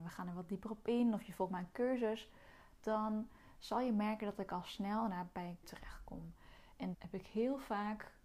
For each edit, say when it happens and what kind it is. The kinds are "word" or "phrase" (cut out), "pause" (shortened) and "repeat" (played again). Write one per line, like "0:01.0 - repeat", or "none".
0:05.6 - word
0:06.9 - word